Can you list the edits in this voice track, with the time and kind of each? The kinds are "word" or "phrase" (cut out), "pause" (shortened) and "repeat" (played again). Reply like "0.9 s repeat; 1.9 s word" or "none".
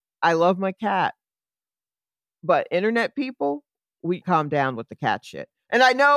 4.2 s phrase